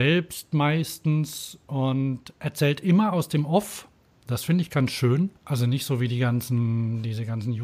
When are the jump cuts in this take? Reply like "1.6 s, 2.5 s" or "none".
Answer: 5.4 s